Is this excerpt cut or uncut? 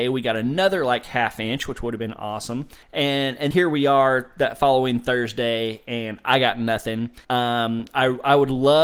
cut